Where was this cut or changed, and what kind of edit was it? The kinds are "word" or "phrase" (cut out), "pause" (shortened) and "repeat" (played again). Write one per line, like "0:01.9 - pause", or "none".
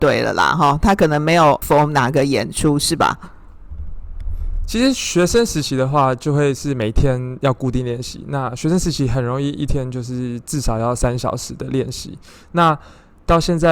0:01.6 - word